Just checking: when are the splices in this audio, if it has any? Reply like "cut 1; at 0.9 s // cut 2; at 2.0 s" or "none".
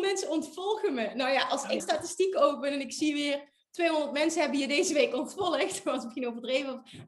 cut 1; at 1.8 s